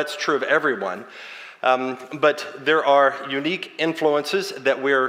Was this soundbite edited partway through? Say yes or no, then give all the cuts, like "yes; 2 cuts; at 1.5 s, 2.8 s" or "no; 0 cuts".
no; 0 cuts